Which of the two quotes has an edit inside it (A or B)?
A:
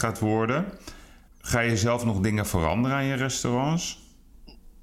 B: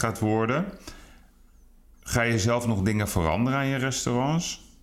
A